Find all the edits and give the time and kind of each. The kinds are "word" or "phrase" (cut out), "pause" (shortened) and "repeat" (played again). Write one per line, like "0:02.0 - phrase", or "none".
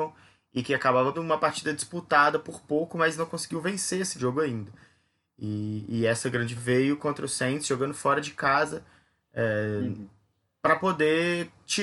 0:01.1 - word
0:04.2 - word
0:06.6 - word